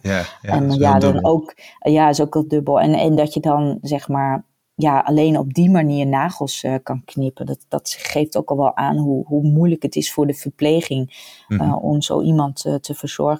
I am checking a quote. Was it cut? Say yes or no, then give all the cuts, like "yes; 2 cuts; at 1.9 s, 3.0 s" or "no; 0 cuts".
no; 0 cuts